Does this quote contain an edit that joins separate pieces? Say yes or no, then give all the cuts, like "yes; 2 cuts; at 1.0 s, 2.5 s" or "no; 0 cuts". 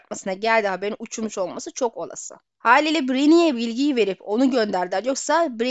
no; 0 cuts